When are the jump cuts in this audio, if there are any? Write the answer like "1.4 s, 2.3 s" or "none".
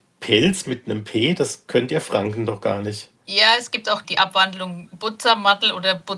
3.2 s, 4.0 s